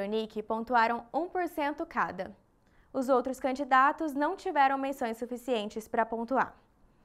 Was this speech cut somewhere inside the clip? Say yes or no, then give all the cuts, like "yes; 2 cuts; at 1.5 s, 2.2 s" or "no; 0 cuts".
no; 0 cuts